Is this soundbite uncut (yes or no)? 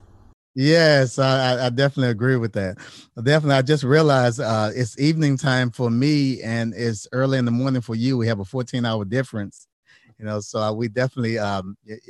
yes